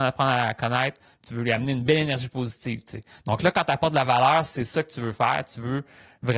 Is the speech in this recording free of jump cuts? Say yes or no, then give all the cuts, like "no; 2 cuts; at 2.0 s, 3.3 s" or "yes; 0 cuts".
yes; 0 cuts